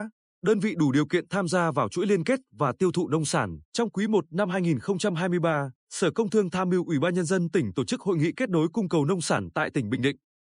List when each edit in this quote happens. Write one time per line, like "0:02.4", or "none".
0:03.6
0:05.8